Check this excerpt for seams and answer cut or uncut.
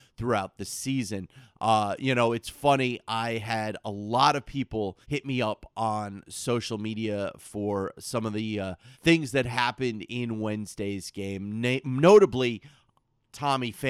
cut